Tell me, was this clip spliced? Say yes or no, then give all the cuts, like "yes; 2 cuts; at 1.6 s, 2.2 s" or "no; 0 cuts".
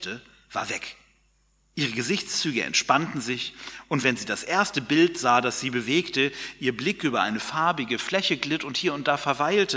no; 0 cuts